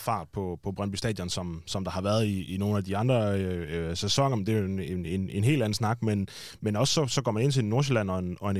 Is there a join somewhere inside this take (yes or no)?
no